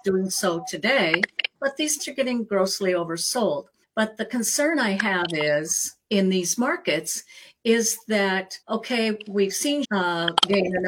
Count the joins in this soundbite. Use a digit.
6